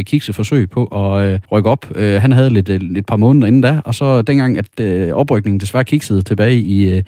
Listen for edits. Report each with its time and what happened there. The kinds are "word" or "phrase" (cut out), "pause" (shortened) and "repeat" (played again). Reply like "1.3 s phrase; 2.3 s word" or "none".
1.4 s pause